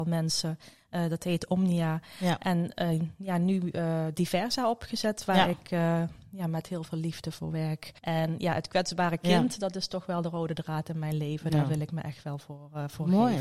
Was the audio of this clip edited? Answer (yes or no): yes